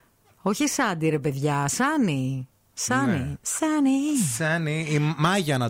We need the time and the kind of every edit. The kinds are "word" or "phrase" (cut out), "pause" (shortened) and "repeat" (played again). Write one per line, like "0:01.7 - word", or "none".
none